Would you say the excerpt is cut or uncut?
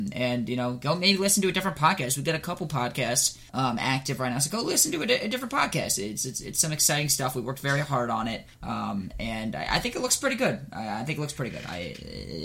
cut